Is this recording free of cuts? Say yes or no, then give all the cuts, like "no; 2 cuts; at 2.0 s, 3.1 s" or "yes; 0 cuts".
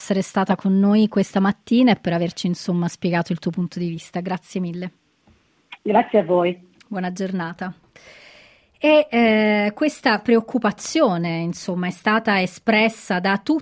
yes; 0 cuts